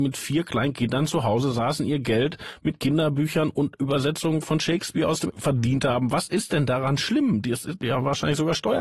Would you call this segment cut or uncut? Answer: cut